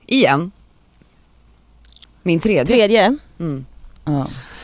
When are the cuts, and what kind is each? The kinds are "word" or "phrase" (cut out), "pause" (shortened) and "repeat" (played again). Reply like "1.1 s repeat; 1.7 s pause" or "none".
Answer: none